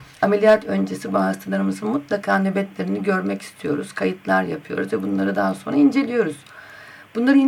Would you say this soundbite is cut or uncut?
uncut